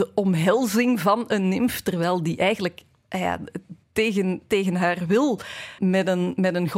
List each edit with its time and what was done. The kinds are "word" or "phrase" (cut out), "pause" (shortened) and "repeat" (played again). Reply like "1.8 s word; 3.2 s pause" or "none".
3.8 s pause; 5.8 s word